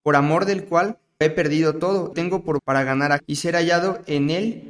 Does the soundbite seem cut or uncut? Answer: cut